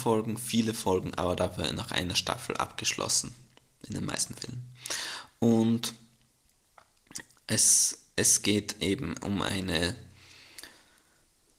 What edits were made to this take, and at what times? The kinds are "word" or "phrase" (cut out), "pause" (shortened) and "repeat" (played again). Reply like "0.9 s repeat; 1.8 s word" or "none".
none